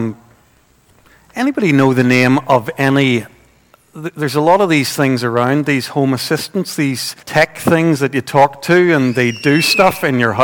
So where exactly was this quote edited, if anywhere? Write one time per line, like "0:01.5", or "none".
0:07.2